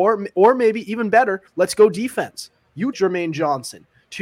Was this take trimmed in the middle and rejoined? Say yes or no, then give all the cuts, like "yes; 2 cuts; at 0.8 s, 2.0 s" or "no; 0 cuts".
yes; 2 cuts; at 1.5 s, 2.9 s